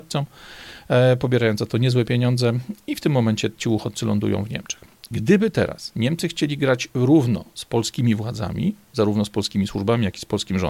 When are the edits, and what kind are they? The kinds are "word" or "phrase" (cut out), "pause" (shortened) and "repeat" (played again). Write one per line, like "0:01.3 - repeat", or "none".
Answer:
none